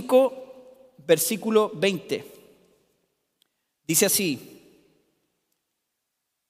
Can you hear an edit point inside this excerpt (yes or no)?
no